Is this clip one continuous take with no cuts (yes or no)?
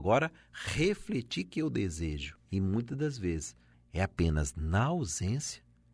no